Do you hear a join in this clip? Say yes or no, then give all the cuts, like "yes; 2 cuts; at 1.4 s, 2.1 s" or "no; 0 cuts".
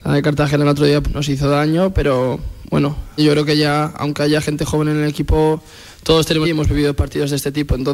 yes; 3 cuts; at 1.0 s, 3.2 s, 6.4 s